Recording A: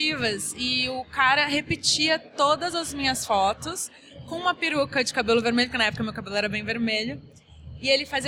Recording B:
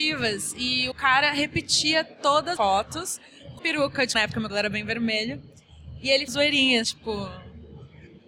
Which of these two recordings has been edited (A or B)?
B